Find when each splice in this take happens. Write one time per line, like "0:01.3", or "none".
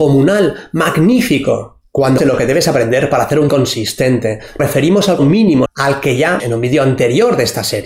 0:02.2
0:03.5
0:04.6
0:05.2
0:05.7
0:06.4